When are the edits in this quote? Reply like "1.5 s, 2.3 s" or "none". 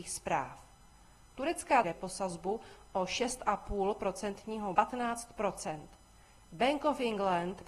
1.8 s, 4.7 s